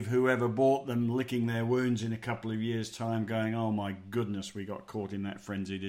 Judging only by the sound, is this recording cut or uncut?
uncut